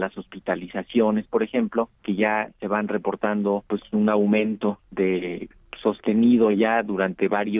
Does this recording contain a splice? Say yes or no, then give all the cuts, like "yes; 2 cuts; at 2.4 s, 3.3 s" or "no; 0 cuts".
yes; 3 cuts; at 2.0 s, 3.7 s, 4.9 s